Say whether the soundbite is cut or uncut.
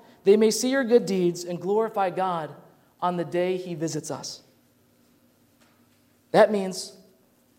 uncut